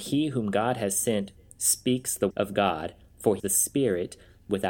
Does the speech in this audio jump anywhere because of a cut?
yes; 2 cuts; at 2.3 s, 3.4 s

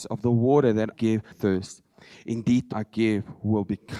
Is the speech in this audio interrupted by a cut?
yes; 3 cuts; at 0.9 s, 1.3 s, 2.7 s

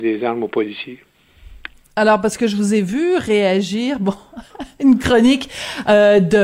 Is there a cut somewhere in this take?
no; 0 cuts

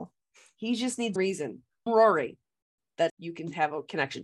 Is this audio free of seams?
no; 3 cuts; at 1.2 s, 1.9 s, 3.1 s

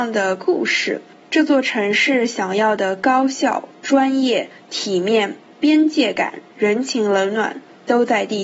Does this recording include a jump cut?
no; 0 cuts

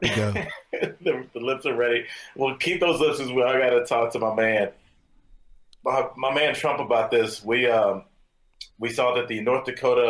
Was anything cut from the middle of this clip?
yes; 1 cut; at 8.7 s

